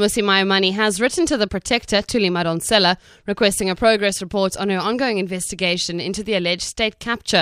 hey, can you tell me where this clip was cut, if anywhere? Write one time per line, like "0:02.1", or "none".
0:01.5